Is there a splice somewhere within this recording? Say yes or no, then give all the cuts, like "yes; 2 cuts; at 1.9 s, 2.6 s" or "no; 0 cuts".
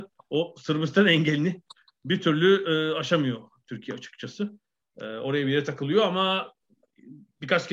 no; 0 cuts